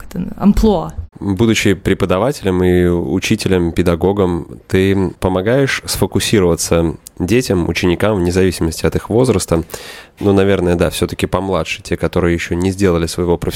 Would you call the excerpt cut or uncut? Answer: uncut